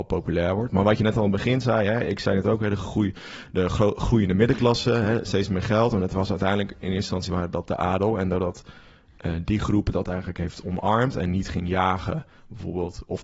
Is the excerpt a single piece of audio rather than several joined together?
yes; 0 cuts

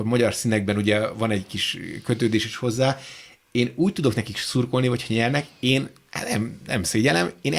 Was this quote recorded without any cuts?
yes; 0 cuts

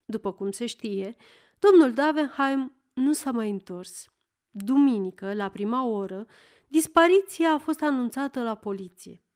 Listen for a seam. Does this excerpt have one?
no; 0 cuts

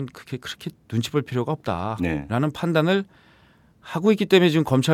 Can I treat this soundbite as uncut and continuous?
yes; 0 cuts

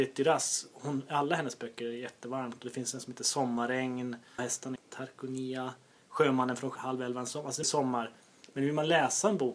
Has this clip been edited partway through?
yes; 4 cuts; at 4.4 s, 4.8 s, 6.8 s, 7.6 s

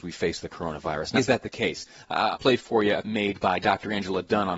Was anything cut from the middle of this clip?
yes; 3 cuts; at 1.2 s, 2.3 s, 3.0 s

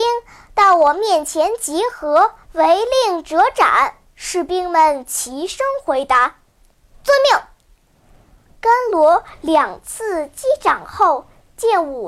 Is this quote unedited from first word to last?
no; 3 cuts; at 2.4 s, 4.1 s, 7.6 s

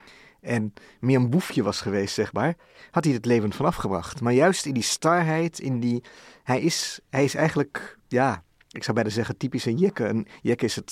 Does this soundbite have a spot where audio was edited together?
no; 0 cuts

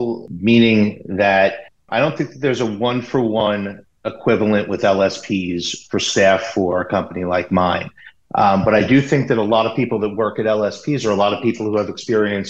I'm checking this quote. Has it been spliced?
yes; 1 cut; at 1.7 s

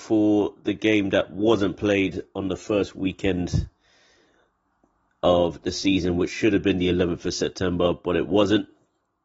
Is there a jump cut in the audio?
no; 0 cuts

